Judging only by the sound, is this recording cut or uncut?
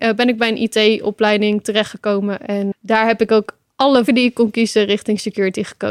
cut